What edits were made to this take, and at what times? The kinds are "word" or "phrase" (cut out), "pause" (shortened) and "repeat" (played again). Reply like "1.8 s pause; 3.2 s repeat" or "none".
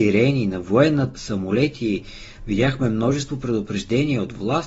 1.1 s word